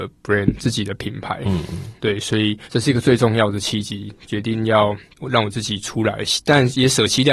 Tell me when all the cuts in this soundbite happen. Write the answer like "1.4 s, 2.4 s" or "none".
2.0 s, 2.7 s